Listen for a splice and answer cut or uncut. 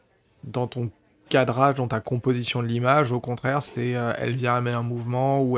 uncut